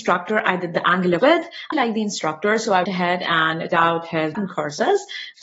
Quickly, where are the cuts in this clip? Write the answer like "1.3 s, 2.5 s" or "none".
1.2 s, 1.7 s, 2.8 s, 3.7 s, 4.3 s